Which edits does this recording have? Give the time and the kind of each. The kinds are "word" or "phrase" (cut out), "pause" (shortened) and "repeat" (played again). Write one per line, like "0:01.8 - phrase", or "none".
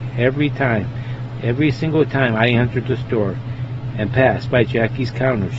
none